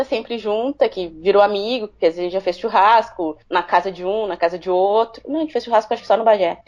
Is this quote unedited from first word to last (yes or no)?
no